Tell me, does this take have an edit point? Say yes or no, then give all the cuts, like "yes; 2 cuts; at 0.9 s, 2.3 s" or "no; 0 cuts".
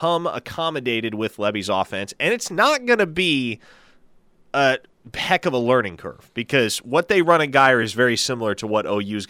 no; 0 cuts